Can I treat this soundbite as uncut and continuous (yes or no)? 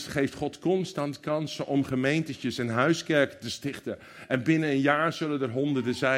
yes